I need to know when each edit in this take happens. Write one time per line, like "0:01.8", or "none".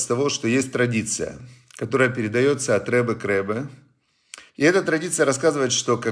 0:04.5